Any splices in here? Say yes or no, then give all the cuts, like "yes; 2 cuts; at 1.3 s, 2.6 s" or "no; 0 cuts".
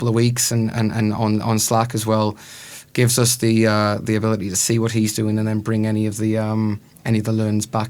no; 0 cuts